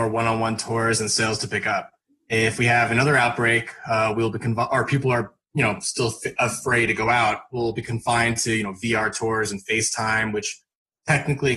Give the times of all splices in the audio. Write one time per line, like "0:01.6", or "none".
none